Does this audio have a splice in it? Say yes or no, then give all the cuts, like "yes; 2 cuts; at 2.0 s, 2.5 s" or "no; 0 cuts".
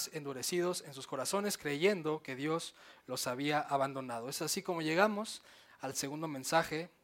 no; 0 cuts